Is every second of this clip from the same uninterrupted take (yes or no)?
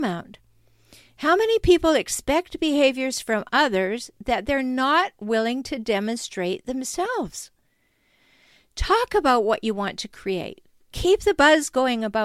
yes